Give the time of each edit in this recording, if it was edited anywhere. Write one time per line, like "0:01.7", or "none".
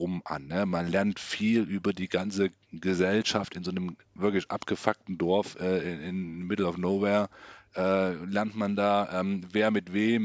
0:04.0